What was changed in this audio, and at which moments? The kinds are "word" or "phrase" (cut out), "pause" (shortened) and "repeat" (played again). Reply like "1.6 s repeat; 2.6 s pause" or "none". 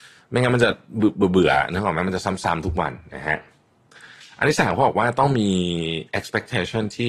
none

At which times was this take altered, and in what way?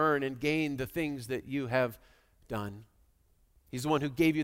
none

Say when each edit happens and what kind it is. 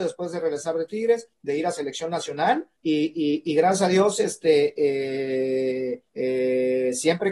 1.3 s pause; 2.8 s pause; 6.1 s pause

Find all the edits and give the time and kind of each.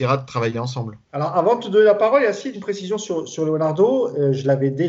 1.0 s pause; 2.5 s word

